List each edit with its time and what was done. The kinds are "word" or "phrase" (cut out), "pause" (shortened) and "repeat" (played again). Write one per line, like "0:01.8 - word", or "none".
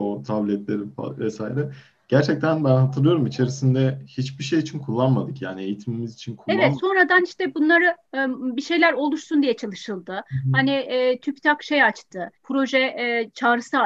0:12.3 - pause